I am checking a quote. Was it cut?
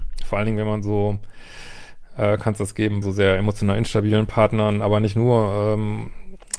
yes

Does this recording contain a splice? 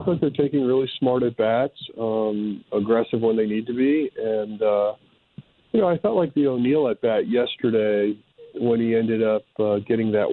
no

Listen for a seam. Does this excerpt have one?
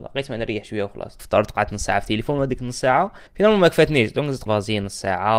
yes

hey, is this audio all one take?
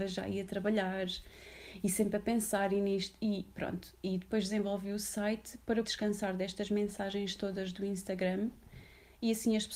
no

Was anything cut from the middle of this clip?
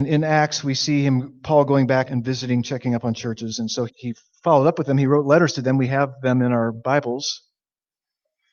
yes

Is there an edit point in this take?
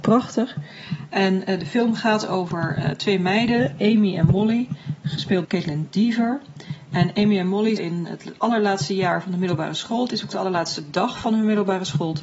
yes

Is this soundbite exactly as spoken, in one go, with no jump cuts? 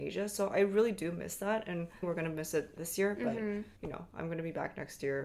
no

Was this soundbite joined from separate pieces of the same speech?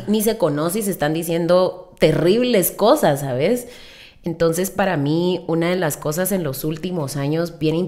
no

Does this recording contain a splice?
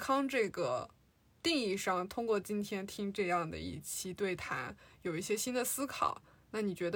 no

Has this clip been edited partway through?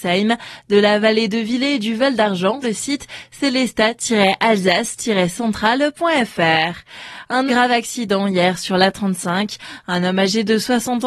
yes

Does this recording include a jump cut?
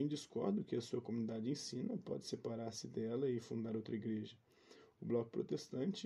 no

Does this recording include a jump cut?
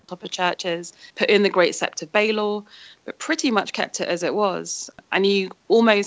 yes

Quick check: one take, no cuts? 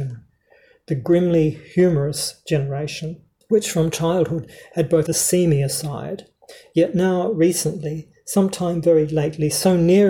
no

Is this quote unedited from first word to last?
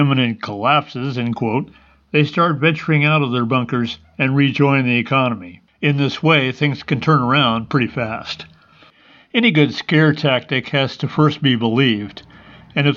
yes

